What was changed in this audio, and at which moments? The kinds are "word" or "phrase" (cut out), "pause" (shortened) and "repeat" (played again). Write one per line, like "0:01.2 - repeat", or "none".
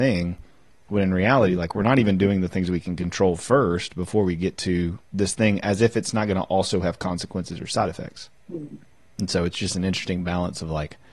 0:05.0 - pause
0:08.4 - pause

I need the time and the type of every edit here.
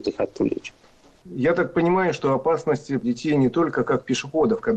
0:03.0 - word

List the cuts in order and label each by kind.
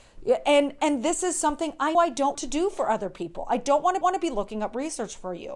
0:01.9 - word
0:02.3 - word
0:04.0 - repeat

